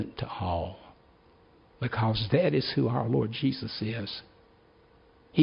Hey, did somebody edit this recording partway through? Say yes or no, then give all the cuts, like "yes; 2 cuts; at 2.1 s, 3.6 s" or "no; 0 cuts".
no; 0 cuts